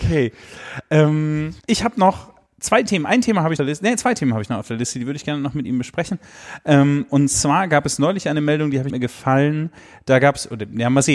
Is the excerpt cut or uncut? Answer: cut